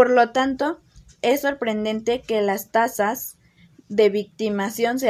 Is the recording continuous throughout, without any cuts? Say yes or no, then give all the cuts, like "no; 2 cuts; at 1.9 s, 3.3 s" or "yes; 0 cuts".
yes; 0 cuts